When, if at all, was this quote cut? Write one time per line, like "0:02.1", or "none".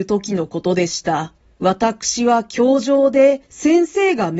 0:01.4
0:03.4